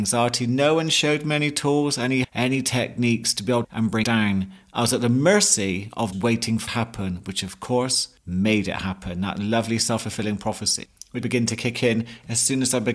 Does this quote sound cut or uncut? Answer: cut